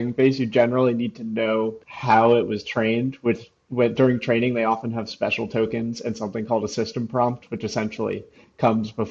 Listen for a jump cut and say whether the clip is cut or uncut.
cut